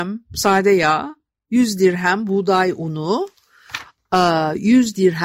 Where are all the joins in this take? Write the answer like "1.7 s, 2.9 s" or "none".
none